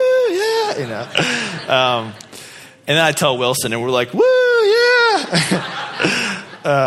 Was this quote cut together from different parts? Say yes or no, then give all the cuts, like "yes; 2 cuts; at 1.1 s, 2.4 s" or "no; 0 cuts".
no; 0 cuts